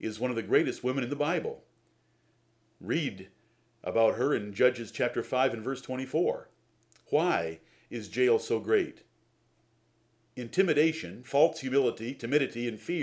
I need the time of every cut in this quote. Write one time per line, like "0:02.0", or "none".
none

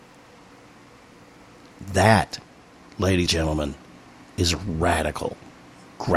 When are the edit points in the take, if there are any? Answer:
0:03.3

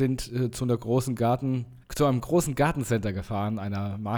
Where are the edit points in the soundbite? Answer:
0:01.8

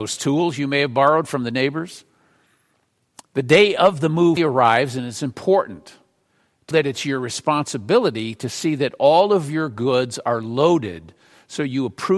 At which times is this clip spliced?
0:04.4
0:06.7

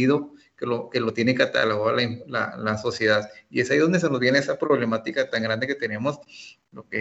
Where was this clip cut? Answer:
none

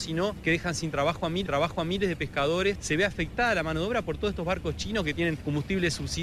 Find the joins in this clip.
0:01.5

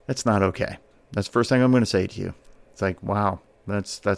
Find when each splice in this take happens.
none

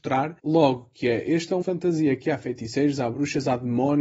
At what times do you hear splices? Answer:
0:01.6

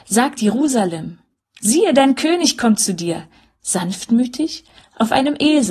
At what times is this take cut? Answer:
none

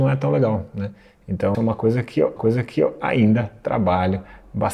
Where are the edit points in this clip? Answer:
0:01.5
0:02.4

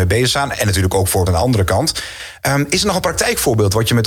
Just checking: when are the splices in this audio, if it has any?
0:01.3

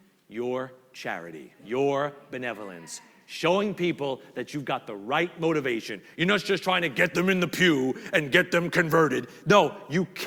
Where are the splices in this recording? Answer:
0:01.6

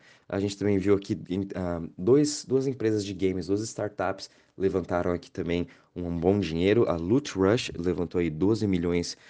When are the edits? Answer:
none

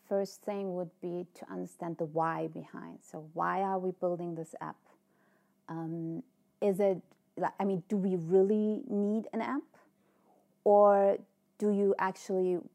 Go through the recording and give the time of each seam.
none

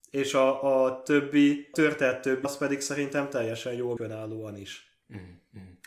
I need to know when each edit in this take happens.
0:01.7
0:02.4
0:04.0

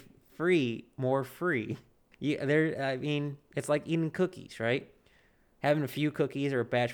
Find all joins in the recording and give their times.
none

